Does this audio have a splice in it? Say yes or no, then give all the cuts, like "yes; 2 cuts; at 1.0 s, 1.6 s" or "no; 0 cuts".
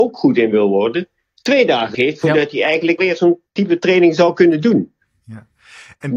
yes; 3 cuts; at 1.9 s, 3.0 s, 3.5 s